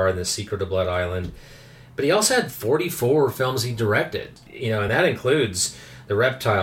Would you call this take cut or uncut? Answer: uncut